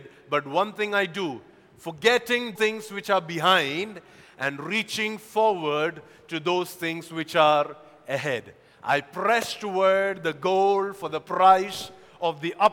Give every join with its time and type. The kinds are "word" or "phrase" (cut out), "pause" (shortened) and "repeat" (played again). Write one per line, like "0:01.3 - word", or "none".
0:02.6 - word